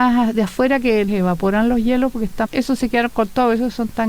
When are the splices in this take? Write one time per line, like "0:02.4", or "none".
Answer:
0:01.1
0:02.4